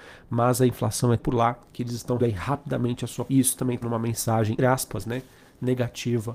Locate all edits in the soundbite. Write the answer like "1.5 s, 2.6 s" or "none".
1.2 s, 2.2 s, 3.3 s, 3.8 s, 4.6 s